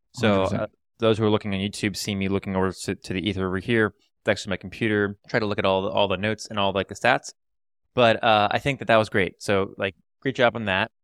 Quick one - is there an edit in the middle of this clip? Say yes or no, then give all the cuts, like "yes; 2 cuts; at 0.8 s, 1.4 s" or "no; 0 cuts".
yes; 1 cut; at 5.2 s